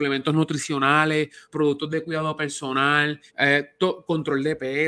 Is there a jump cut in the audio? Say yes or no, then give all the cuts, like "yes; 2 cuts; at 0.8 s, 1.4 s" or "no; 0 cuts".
yes; 2 cuts; at 1.4 s, 3.3 s